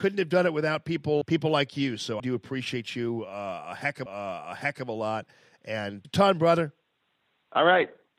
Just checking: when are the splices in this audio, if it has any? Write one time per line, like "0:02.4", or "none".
0:01.2
0:02.2
0:04.1
0:06.0
0:07.0